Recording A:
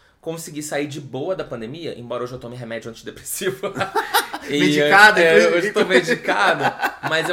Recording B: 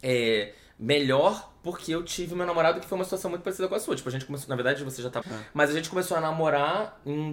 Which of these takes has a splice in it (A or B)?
B